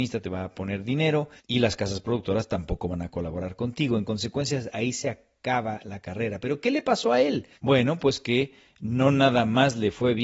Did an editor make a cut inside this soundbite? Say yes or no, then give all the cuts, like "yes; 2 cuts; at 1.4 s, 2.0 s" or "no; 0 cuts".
yes; 2 cuts; at 1.4 s, 7.5 s